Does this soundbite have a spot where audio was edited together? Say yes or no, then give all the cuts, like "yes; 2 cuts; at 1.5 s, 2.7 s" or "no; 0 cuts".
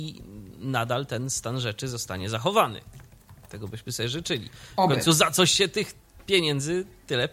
no; 0 cuts